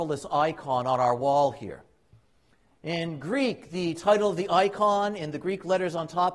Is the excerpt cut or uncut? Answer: uncut